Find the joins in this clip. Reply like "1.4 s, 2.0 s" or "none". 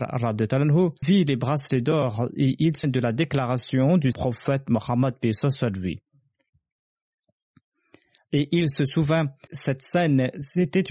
1.0 s, 2.8 s, 4.1 s, 9.5 s